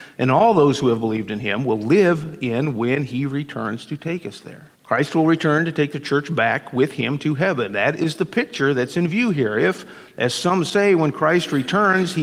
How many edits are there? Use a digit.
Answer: 1